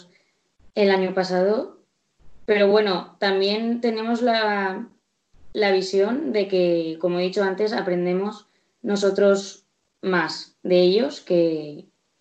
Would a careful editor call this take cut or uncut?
uncut